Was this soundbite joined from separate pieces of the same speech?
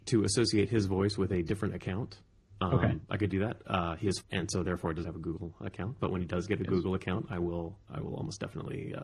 yes; 4 cuts; at 3.3 s, 4.2 s, 5.0 s, 7.9 s

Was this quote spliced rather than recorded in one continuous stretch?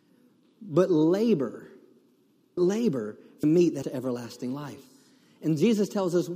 yes; 3 cuts; at 2.6 s, 3.4 s, 3.8 s

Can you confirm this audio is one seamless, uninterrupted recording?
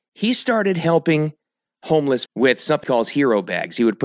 no; 2 cuts; at 2.3 s, 2.8 s

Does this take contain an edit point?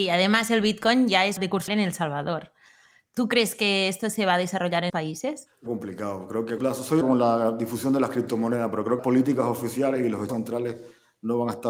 yes; 8 cuts; at 1.4 s, 1.7 s, 4.9 s, 5.7 s, 6.6 s, 7.0 s, 9.0 s, 10.3 s

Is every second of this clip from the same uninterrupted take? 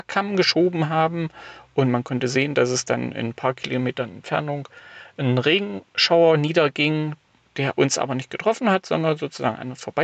yes; 0 cuts

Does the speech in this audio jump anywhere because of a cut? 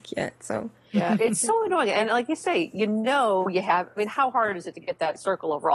no; 0 cuts

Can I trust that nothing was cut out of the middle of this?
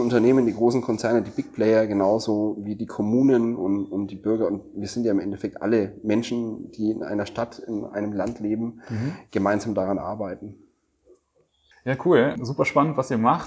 yes; 0 cuts

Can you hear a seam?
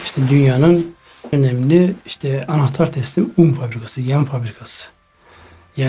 yes; 1 cut; at 1.3 s

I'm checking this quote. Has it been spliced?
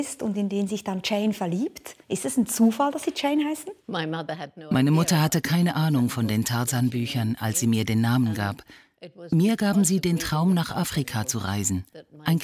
yes; 2 cuts; at 2.0 s, 3.8 s

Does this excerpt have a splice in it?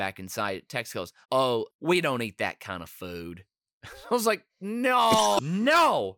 yes; 1 cut; at 1.2 s

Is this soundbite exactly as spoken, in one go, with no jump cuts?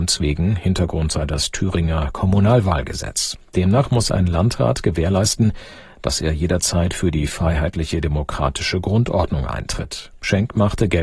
yes; 0 cuts

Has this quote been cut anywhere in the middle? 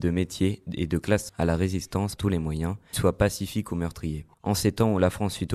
yes; 4 cuts; at 1.3 s, 2.2 s, 2.9 s, 4.3 s

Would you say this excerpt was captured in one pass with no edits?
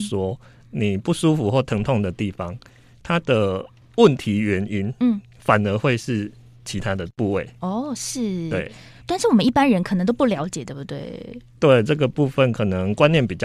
yes; 0 cuts

